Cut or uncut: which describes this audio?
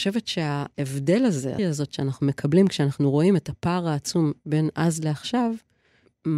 cut